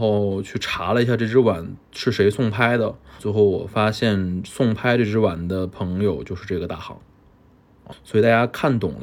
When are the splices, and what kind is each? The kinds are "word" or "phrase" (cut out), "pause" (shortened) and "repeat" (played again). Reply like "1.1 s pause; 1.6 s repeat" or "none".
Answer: 3.2 s word; 7.9 s word